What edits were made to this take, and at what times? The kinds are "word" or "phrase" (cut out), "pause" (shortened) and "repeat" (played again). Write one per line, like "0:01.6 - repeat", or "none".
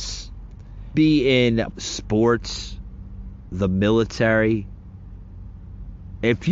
0:00.9 - word
0:01.7 - word
0:03.5 - word